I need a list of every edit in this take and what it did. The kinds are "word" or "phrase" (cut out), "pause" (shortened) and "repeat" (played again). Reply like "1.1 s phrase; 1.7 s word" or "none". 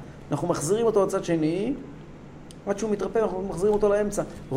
none